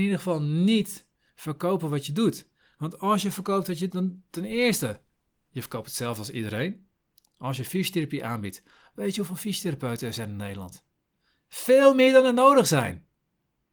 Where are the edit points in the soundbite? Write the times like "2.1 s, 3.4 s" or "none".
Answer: 3.9 s